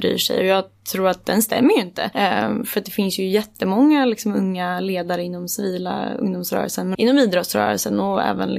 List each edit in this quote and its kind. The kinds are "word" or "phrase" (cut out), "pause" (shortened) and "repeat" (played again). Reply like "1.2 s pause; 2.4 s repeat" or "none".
6.9 s word